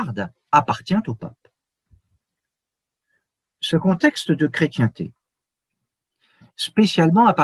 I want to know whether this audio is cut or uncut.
uncut